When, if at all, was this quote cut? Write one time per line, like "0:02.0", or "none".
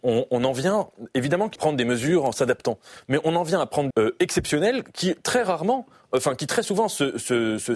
0:01.6
0:03.9